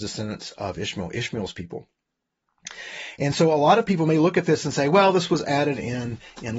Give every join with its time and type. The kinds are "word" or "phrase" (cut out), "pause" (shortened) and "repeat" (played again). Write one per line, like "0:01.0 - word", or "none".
none